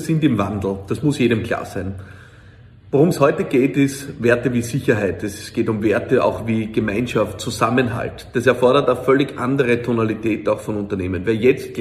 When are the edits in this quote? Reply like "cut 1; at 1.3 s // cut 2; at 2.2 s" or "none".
none